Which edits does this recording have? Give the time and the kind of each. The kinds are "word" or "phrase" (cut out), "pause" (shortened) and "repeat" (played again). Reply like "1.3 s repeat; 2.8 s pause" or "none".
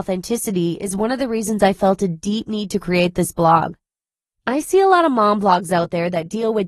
none